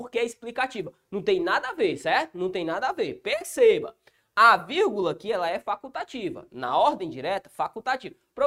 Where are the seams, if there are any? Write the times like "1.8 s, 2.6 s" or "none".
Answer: none